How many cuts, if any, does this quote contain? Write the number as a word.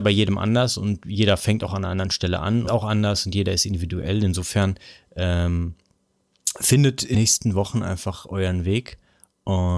two